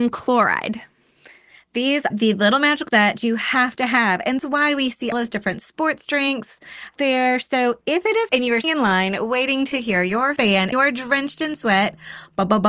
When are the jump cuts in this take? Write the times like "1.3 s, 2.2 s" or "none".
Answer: 2.1 s, 2.9 s, 4.4 s, 5.1 s, 7.0 s, 8.3 s, 8.6 s, 10.4 s, 10.7 s